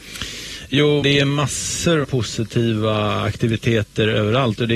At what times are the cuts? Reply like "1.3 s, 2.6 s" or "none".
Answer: 1.0 s, 2.0 s